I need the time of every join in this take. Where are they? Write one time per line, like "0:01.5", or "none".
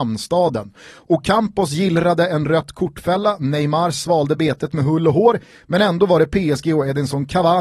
none